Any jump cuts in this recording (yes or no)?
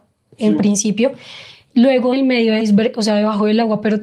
yes